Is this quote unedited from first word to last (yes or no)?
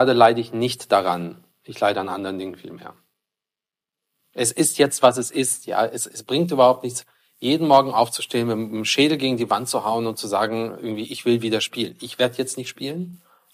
no